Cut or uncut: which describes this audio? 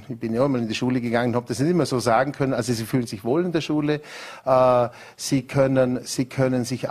uncut